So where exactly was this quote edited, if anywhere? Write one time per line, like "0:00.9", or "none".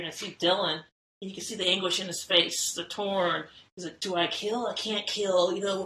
none